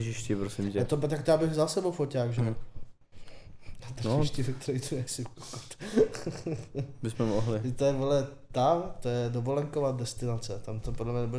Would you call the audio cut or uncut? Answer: cut